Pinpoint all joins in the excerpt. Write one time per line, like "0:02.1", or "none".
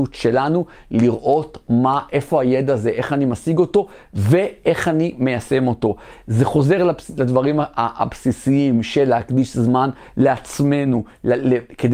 none